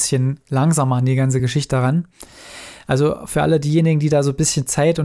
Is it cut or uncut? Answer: uncut